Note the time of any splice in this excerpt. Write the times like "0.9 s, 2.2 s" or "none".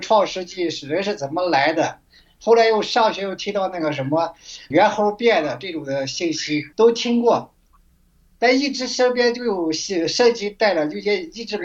4.7 s, 6.7 s

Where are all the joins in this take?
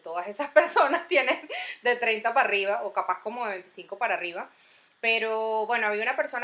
none

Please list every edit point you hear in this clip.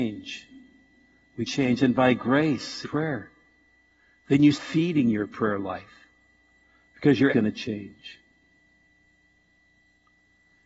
1.5 s, 2.8 s, 4.5 s, 7.3 s

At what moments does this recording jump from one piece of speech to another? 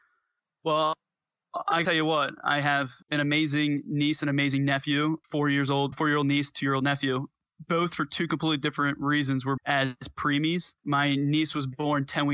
1.8 s, 3.0 s, 5.2 s, 5.9 s, 9.6 s, 10.8 s

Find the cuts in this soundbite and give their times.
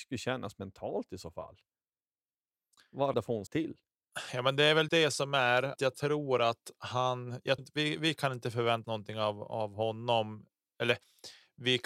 3.1 s, 3.5 s, 4.9 s, 5.8 s, 7.6 s, 8.8 s

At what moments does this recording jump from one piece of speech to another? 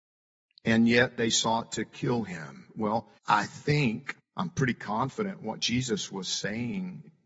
3.2 s, 4.2 s

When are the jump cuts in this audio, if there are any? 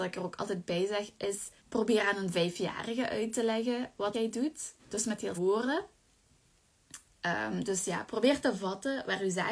1.6 s, 4.1 s, 4.8 s, 5.4 s

